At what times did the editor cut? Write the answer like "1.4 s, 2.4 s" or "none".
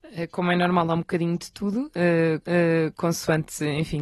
2.4 s